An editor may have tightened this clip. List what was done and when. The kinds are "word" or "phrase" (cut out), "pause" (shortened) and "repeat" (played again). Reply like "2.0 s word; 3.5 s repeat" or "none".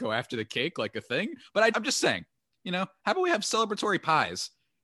1.7 s word